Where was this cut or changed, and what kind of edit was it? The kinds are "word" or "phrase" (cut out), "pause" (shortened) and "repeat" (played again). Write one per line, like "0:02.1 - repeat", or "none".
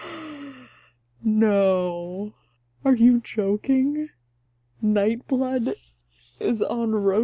none